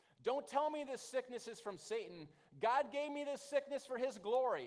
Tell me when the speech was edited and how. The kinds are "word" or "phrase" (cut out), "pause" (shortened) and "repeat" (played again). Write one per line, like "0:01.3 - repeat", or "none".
none